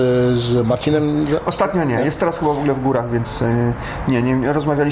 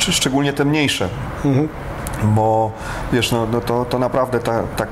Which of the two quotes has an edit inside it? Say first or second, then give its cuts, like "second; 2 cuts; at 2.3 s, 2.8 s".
first; 1 cut; at 2.0 s